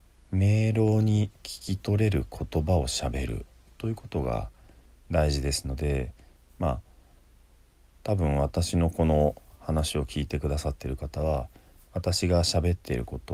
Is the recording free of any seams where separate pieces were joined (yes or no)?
yes